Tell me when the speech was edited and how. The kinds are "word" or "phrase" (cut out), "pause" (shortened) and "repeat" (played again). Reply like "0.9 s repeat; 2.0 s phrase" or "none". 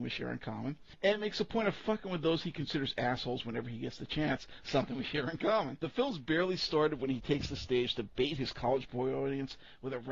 none